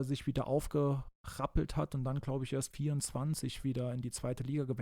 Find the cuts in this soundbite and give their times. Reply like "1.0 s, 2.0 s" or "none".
2.7 s